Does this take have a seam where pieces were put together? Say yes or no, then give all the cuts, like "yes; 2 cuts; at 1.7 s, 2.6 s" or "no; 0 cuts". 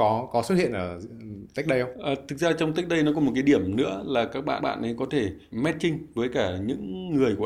yes; 2 cuts; at 4.6 s, 5.5 s